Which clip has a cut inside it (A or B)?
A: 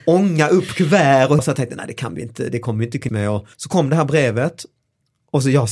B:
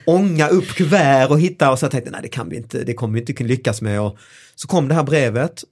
A